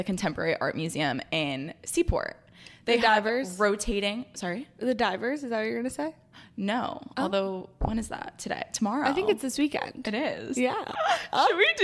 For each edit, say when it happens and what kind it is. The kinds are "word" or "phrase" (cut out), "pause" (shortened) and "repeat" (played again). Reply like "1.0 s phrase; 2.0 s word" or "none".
none